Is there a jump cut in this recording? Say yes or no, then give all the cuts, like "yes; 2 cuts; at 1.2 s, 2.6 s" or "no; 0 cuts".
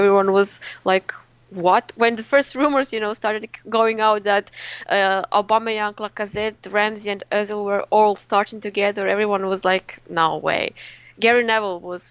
no; 0 cuts